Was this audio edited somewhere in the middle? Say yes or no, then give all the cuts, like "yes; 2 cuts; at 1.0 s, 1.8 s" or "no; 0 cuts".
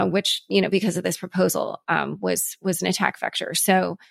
no; 0 cuts